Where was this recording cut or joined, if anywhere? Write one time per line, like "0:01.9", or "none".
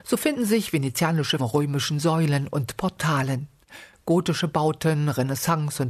0:01.4